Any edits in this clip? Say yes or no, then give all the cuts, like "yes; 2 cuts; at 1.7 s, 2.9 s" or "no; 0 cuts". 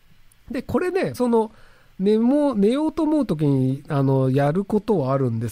yes; 1 cut; at 1.1 s